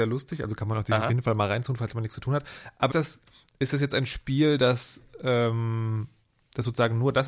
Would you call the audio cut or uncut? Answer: cut